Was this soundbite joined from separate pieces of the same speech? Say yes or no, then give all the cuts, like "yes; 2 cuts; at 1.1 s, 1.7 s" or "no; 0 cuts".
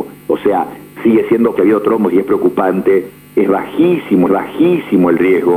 yes; 2 cuts; at 1.6 s, 4.3 s